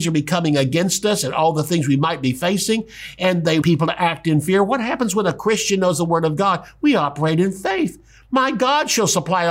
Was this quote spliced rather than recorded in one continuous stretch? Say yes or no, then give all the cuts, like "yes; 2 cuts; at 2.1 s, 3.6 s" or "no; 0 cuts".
yes; 1 cut; at 3.6 s